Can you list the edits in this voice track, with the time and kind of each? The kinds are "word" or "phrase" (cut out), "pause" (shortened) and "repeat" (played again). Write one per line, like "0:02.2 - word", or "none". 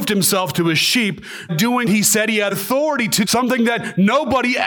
0:01.5 - word
0:01.9 - word
0:02.5 - word
0:03.2 - word